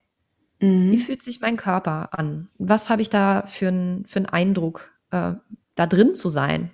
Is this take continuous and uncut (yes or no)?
no